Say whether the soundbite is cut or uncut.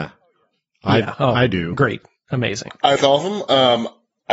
cut